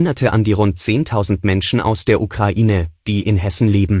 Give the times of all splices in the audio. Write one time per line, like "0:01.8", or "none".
none